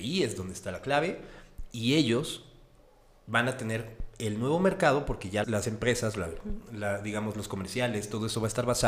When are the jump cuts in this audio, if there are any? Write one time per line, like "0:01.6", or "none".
0:05.4